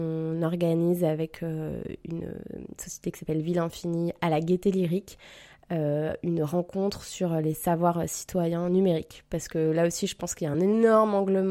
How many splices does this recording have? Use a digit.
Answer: 0